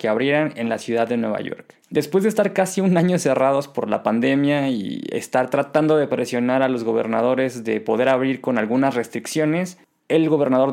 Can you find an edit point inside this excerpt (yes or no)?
yes